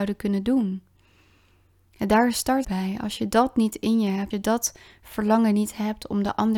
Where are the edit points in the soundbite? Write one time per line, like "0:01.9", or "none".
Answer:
0:02.6
0:04.3